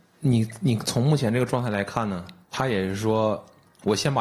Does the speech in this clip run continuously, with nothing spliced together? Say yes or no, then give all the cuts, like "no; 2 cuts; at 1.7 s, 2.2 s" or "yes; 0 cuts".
no; 1 cut; at 2.4 s